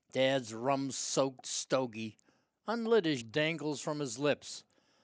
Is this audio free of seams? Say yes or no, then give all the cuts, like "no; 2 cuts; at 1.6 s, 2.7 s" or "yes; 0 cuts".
no; 1 cut; at 3.2 s